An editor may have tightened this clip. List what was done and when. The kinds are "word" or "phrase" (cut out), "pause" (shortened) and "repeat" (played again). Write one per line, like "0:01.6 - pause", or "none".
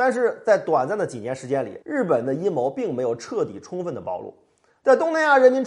0:01.8 - pause